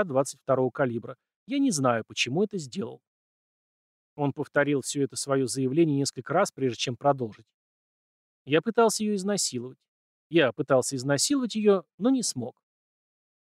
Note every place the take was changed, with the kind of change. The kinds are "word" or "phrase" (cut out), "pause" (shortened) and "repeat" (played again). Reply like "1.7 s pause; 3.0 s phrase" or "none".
none

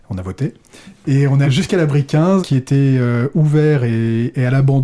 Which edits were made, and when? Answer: 1.4 s word; 2.4 s word

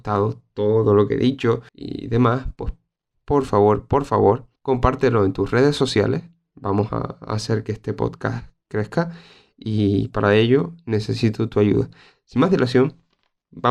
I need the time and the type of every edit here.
1.7 s pause; 3.1 s phrase; 4.6 s pause

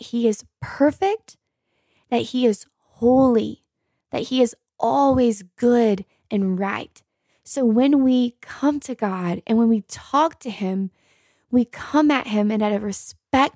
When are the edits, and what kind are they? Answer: none

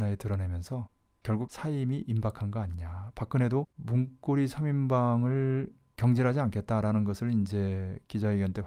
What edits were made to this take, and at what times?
3.7 s pause

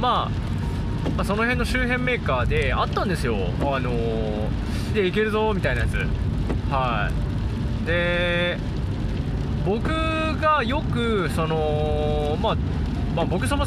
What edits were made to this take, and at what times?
4.9 s word

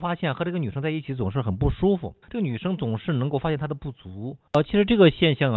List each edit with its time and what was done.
2.2 s pause; 4.5 s pause

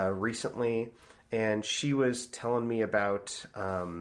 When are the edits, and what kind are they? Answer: none

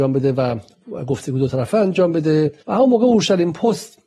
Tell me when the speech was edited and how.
2.6 s pause

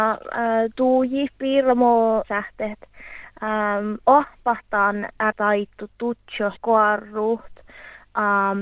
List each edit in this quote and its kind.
2.2 s word; 5.3 s word; 6.6 s word

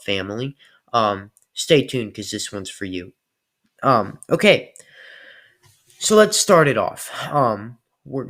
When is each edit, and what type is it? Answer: none

